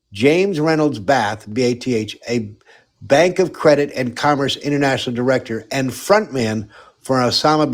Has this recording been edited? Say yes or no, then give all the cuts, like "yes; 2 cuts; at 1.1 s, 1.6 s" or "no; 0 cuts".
no; 0 cuts